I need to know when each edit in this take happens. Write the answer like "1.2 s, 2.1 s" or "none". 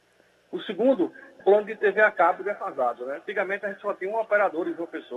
1.4 s